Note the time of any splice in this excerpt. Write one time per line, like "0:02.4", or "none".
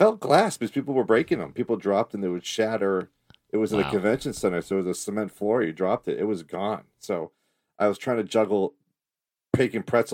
none